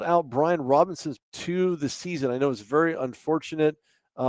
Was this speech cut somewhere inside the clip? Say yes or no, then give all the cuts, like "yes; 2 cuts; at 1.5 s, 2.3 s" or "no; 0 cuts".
yes; 1 cut; at 1.1 s